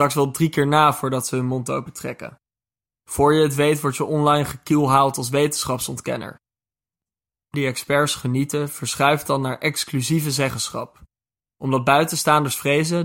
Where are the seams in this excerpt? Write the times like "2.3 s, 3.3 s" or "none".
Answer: 7.5 s